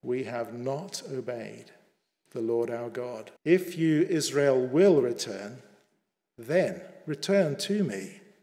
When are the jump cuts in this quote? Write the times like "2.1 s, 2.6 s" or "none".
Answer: 3.4 s

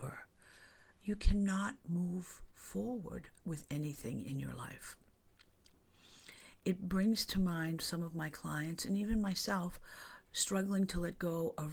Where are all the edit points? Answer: 3.4 s

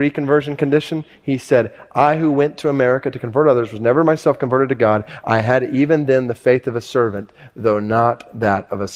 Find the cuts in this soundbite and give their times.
none

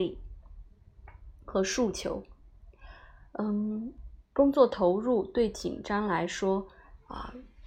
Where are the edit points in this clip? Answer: 3.3 s

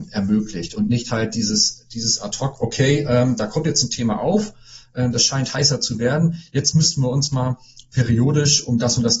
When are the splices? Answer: none

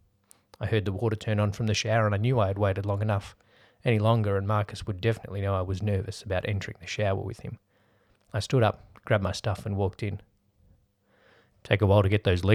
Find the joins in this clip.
none

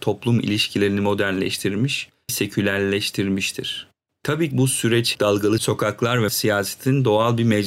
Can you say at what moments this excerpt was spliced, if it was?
2.3 s, 4.5 s, 5.1 s, 5.6 s, 6.3 s

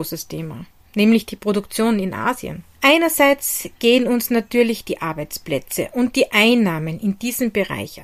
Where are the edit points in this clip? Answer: 2.7 s

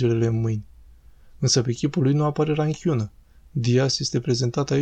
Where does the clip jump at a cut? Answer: none

